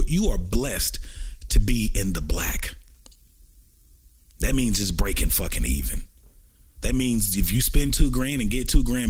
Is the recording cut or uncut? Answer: uncut